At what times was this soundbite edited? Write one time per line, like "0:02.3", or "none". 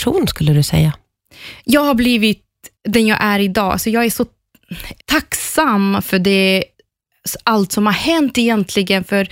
0:02.8
0:05.0